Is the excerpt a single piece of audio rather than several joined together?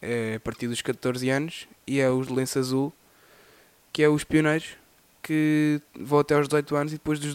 yes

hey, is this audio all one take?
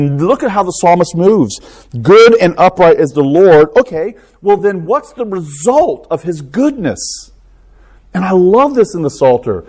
yes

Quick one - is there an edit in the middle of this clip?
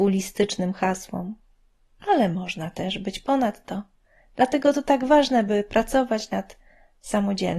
no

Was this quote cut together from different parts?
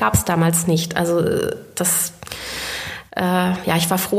no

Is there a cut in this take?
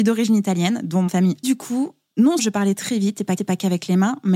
yes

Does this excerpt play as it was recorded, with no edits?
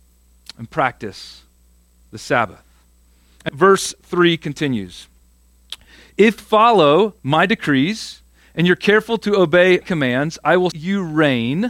no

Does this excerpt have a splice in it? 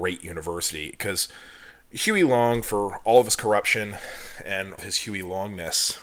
yes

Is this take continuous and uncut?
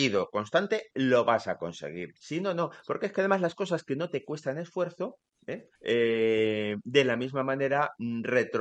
no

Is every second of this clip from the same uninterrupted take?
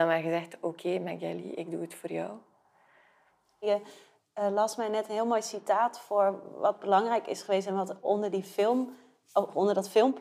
yes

